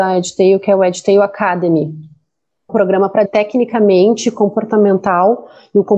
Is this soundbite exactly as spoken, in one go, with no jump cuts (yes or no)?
no